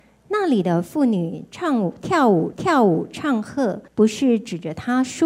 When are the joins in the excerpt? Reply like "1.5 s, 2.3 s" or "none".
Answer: 2.5 s, 3.9 s